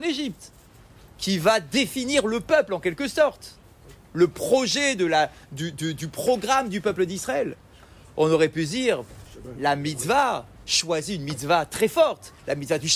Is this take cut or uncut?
uncut